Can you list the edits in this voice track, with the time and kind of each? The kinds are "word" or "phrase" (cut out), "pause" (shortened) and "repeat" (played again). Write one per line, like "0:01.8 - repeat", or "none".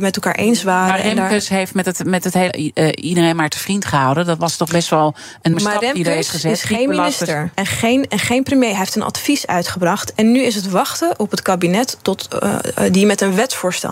0:02.5 - phrase
0:05.5 - word
0:07.5 - pause